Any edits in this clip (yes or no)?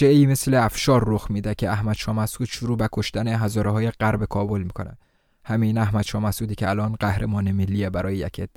no